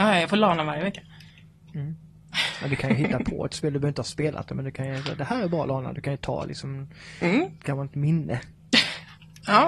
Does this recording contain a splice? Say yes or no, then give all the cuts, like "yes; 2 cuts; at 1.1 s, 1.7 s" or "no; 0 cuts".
no; 0 cuts